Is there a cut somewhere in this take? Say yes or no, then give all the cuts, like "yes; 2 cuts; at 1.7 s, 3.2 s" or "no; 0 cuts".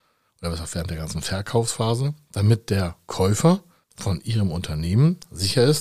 no; 0 cuts